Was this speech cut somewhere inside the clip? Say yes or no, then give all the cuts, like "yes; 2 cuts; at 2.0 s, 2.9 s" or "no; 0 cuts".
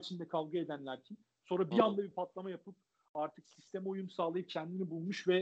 no; 0 cuts